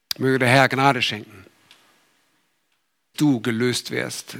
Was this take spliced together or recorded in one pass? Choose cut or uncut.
cut